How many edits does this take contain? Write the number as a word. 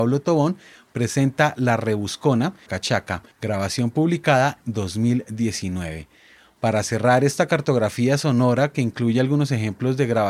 three